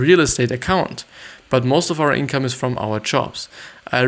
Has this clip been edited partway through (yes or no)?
no